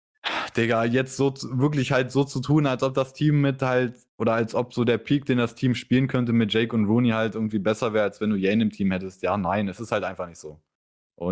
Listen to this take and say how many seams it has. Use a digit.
1